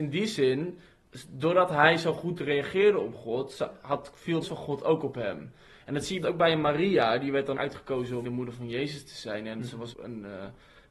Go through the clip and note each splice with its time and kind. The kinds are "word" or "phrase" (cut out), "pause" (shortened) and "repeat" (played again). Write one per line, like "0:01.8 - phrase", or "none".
0:04.4 - word
0:06.2 - word
0:07.5 - word
0:08.2 - word
0:09.9 - word